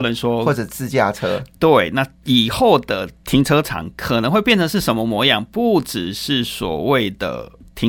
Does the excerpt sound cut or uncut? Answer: uncut